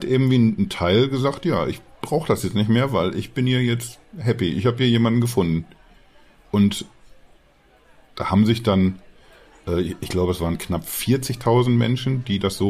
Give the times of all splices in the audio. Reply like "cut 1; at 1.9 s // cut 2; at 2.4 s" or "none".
none